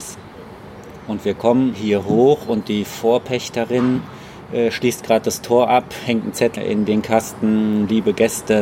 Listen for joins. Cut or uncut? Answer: uncut